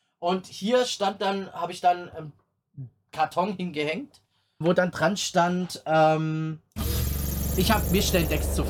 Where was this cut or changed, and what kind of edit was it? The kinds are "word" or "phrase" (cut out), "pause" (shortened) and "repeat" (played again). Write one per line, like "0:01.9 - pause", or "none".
0:04.6 - word